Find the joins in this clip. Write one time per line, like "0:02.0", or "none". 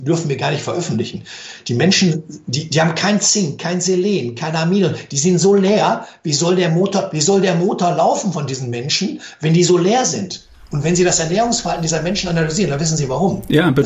none